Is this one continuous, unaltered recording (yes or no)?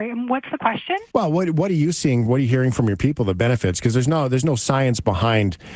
no